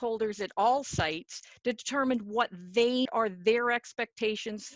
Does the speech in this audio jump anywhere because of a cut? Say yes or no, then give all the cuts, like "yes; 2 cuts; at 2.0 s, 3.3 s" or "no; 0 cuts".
yes; 1 cut; at 3.1 s